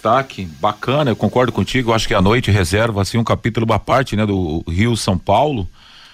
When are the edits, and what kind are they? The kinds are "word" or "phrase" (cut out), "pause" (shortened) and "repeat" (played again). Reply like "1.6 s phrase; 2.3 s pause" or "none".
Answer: none